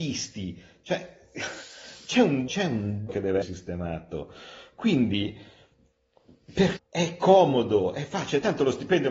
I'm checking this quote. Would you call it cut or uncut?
cut